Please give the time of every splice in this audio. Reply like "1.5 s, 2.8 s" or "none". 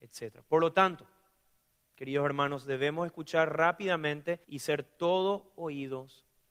4.4 s